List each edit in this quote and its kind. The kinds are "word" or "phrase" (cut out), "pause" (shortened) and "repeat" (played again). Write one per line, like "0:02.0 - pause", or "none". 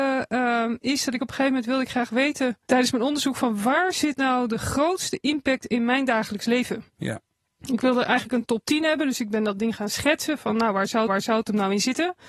0:02.6 - pause
0:06.9 - pause
0:11.1 - repeat